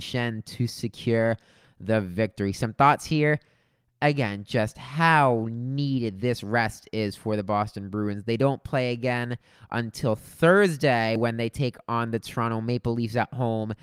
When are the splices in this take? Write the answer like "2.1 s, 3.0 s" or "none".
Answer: none